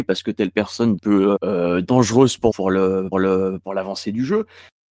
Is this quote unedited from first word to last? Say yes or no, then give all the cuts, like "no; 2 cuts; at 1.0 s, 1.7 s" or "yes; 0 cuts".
no; 4 cuts; at 1.0 s, 1.4 s, 2.5 s, 3.1 s